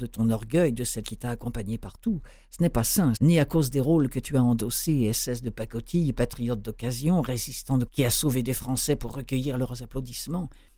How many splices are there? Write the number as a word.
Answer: three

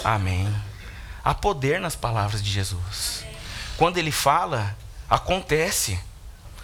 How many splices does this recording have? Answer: zero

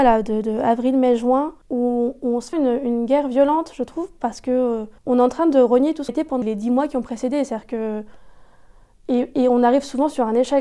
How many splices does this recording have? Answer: five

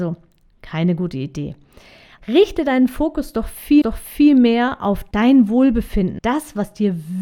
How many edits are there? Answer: two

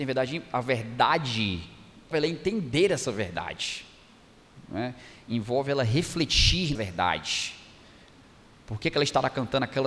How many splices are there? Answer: two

